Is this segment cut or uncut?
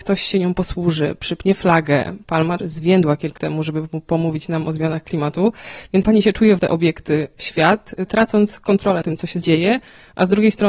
cut